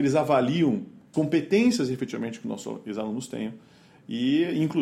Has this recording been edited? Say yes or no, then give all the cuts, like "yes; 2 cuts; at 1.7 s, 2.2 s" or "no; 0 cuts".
yes; 1 cut; at 1.1 s